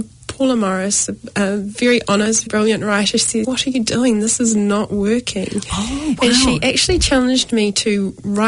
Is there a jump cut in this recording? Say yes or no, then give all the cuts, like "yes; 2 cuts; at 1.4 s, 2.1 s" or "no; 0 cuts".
yes; 2 cuts; at 2.5 s, 3.4 s